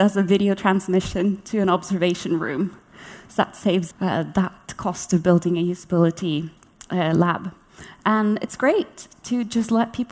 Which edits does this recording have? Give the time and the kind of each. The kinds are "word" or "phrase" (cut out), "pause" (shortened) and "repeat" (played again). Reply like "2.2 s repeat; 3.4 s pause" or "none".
3.9 s word